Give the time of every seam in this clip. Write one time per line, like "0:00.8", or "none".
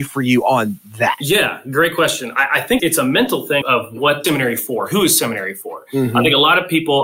0:02.8
0:03.6
0:04.2